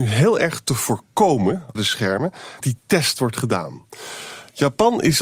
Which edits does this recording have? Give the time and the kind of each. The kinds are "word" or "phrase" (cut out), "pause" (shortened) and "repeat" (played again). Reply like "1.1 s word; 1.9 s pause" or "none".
1.8 s word; 2.6 s word